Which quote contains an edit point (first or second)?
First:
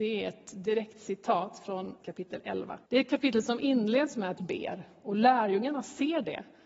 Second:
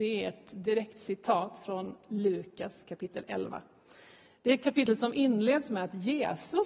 first